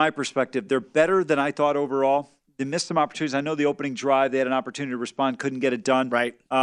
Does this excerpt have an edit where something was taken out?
no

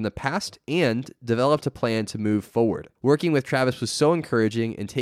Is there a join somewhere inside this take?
yes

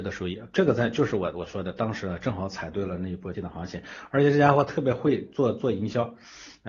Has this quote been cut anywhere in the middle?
yes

